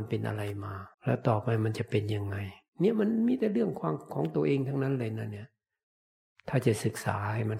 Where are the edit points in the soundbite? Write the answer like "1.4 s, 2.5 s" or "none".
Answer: 0.9 s